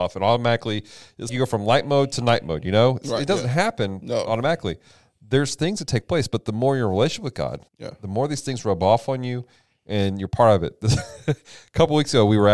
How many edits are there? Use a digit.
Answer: 2